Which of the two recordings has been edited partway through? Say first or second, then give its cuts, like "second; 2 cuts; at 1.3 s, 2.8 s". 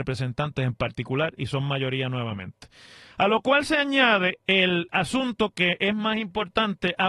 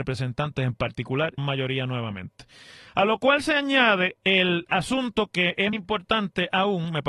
second; 2 cuts; at 1.4 s, 5.7 s